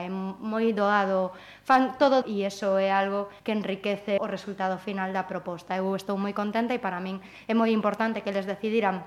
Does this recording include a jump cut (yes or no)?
yes